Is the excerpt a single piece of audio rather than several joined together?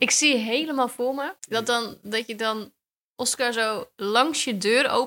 no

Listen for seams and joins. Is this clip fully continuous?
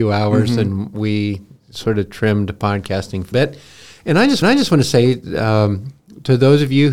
no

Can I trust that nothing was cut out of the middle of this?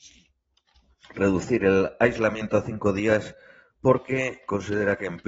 yes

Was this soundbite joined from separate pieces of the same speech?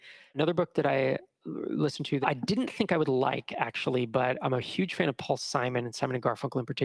yes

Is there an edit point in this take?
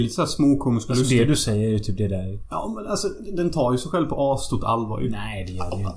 no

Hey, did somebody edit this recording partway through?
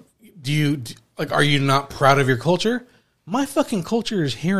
no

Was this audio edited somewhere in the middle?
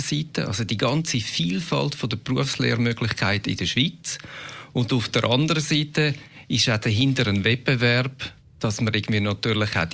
no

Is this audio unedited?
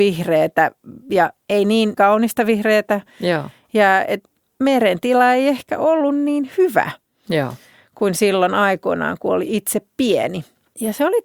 yes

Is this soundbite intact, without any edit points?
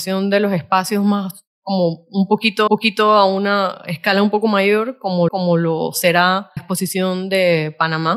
no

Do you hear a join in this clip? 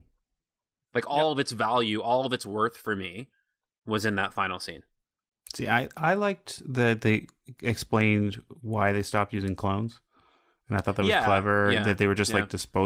no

